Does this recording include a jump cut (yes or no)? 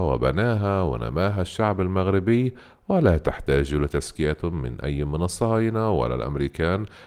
no